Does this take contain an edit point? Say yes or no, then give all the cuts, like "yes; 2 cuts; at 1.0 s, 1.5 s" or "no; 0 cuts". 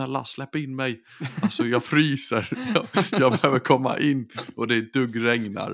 no; 0 cuts